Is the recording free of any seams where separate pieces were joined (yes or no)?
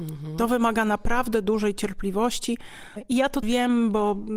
no